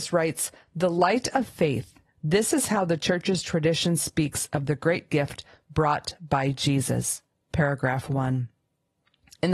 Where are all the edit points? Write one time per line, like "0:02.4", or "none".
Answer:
none

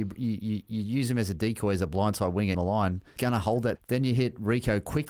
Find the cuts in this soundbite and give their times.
0:02.5
0:03.2
0:03.8

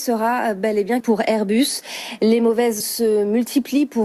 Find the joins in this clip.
0:01.0
0:02.8

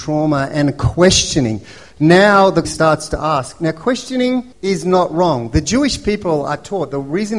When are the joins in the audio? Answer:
0:02.6
0:04.5

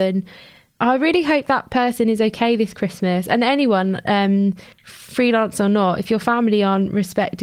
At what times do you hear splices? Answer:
0:04.7

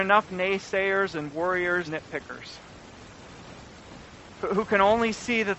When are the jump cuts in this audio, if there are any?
0:01.9

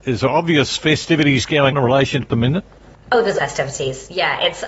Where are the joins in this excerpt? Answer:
0:01.7
0:02.2
0:03.4

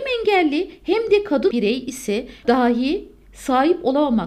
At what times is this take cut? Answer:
0:01.5
0:02.4

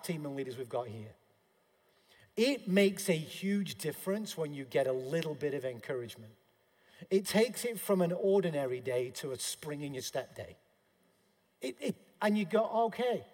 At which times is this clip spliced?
none

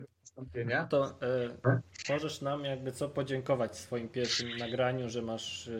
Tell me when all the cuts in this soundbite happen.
none

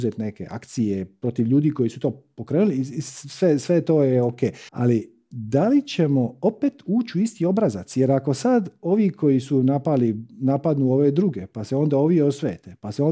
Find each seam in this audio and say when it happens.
0:04.7

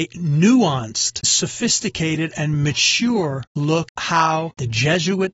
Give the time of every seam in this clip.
0:01.2
0:03.9

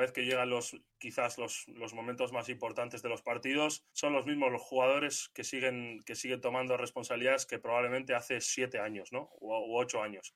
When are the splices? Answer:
0:03.9

